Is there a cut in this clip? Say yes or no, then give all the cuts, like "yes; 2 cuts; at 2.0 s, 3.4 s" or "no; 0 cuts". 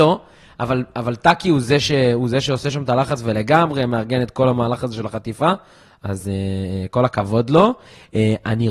no; 0 cuts